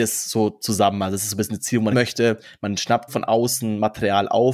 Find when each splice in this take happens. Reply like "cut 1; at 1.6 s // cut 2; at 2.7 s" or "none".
cut 1; at 1.9 s // cut 2; at 3.1 s